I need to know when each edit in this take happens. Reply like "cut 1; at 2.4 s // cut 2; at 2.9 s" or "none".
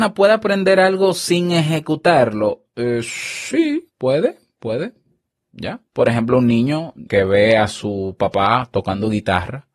cut 1; at 3.9 s // cut 2; at 5.9 s // cut 3; at 7.1 s

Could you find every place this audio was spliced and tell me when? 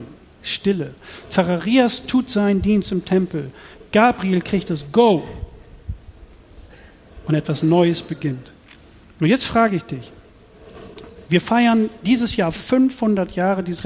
none

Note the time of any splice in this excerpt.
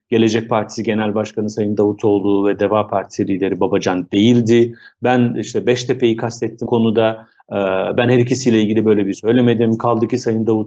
cut 1; at 6.7 s // cut 2; at 9.1 s

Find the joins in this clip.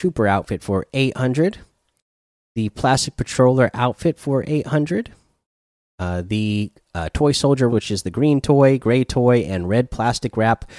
cut 1; at 7.7 s

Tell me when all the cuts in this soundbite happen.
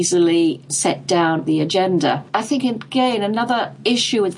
cut 1; at 1.5 s

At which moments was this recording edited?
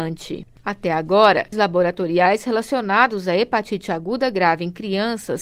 cut 1; at 1.5 s

